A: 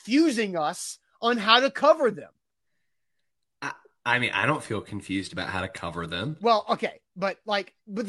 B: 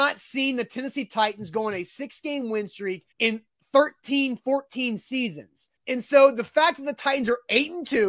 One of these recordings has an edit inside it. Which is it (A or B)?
B